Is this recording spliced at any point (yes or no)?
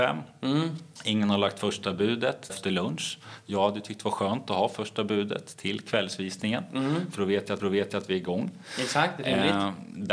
yes